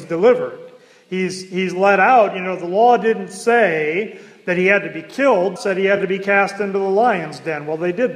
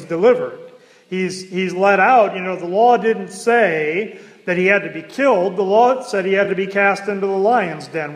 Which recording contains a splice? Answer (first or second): first